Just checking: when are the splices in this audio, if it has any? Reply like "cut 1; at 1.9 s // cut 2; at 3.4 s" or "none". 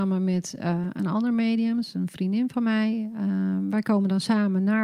none